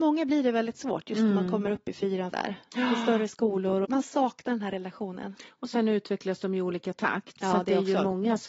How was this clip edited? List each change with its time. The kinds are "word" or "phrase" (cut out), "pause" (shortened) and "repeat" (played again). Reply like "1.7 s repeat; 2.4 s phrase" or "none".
2.3 s word; 3.8 s word